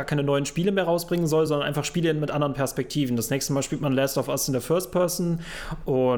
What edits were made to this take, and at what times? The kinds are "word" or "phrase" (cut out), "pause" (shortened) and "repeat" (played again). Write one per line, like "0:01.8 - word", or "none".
none